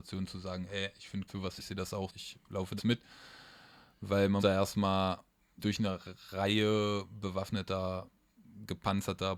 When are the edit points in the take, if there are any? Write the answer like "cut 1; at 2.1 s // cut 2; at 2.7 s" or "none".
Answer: cut 1; at 1.3 s // cut 2; at 1.6 s // cut 3; at 2.1 s // cut 4; at 2.8 s // cut 5; at 4.4 s // cut 6; at 5.6 s